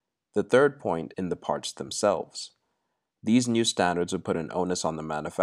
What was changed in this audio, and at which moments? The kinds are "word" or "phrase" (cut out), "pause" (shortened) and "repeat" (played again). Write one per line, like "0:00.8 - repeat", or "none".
0:01.1 - word